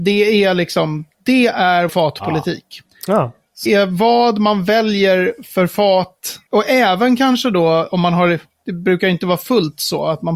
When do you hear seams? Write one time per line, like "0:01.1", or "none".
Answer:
0:01.9
0:03.7